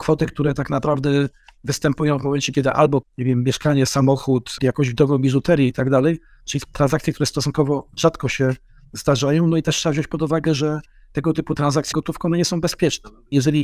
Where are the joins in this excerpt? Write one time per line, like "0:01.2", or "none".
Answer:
0:03.0
0:11.9